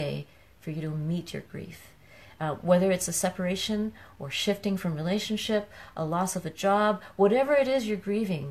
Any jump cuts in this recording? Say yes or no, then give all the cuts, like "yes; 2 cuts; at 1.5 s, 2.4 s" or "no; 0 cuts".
no; 0 cuts